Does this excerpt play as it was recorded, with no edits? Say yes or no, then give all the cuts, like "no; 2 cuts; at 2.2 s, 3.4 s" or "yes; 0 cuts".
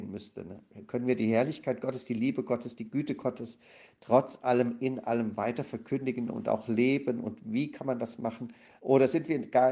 yes; 0 cuts